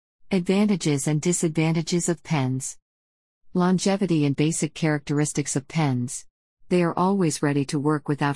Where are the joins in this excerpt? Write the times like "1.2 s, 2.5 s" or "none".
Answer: 4.3 s